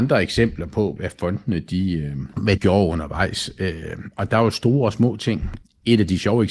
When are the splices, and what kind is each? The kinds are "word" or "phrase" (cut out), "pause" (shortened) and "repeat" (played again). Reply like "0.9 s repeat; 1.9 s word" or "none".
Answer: 1.0 s word; 2.6 s word